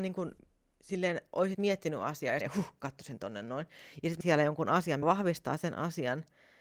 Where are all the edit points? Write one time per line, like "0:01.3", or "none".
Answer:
0:01.5
0:02.4
0:04.2
0:05.0